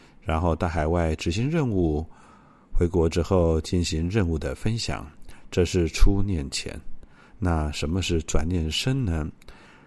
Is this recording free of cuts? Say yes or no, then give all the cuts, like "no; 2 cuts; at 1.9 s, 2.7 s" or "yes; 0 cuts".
yes; 0 cuts